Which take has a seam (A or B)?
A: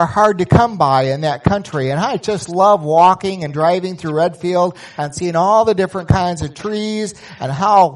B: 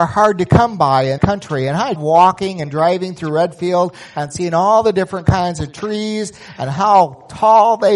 B